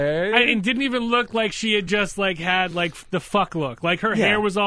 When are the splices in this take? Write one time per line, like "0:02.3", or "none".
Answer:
none